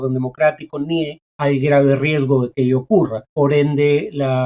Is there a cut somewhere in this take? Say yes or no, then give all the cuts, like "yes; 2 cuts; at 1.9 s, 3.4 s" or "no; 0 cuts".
yes; 2 cuts; at 1.3 s, 3.3 s